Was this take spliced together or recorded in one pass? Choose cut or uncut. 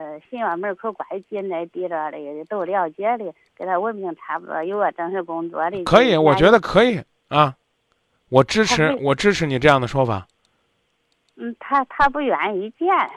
uncut